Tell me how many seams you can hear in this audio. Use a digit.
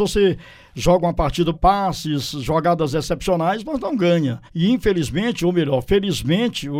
2